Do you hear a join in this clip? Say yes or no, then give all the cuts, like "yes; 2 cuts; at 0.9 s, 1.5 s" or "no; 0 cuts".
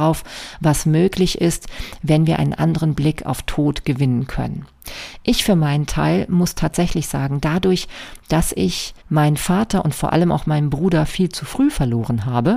yes; 1 cut; at 9.0 s